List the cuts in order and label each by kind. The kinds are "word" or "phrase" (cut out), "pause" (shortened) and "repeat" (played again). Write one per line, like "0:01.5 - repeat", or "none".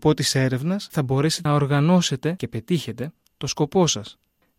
0:01.5 - word